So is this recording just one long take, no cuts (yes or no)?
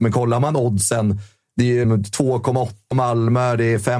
no